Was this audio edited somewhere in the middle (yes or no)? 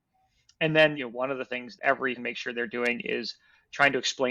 yes